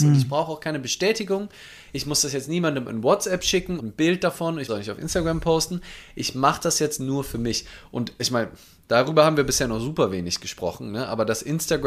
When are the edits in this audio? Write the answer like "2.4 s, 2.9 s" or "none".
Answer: 3.8 s, 4.7 s